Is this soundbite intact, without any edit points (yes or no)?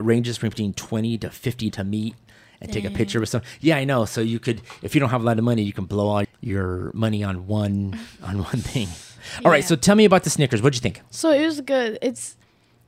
no